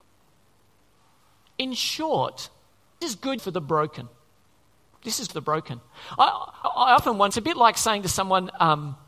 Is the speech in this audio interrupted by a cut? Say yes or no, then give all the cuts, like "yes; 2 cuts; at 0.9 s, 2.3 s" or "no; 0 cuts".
yes; 6 cuts; at 3.0 s, 3.4 s, 4.7 s, 5.3 s, 6.6 s, 7.3 s